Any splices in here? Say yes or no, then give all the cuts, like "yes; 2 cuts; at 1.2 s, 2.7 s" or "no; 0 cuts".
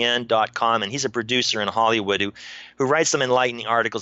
no; 0 cuts